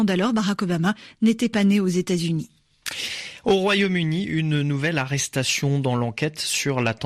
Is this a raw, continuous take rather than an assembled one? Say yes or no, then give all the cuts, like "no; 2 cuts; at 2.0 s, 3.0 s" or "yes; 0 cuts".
yes; 0 cuts